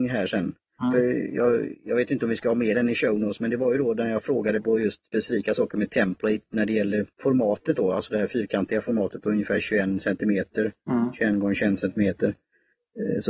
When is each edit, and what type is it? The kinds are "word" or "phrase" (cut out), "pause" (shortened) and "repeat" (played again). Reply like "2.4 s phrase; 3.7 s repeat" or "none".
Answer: 7.1 s pause